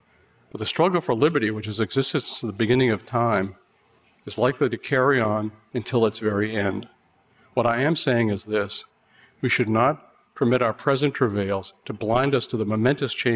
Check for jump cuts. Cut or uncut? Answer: uncut